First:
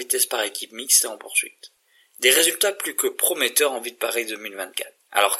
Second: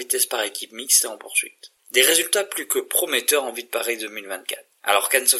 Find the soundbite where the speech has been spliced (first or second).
second